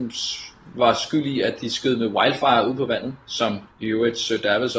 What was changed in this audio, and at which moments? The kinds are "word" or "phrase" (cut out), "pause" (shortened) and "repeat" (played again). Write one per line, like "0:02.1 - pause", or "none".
0:03.7 - pause